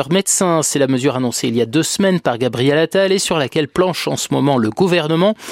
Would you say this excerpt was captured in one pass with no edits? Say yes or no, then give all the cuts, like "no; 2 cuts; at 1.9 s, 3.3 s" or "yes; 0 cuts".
yes; 0 cuts